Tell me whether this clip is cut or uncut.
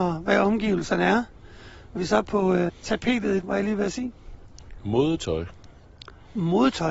cut